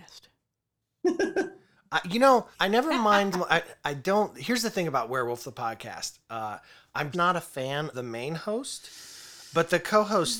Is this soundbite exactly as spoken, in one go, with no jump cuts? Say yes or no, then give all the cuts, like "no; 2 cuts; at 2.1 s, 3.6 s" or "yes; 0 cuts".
no; 4 cuts; at 2.5 s, 3.3 s, 7.1 s, 7.9 s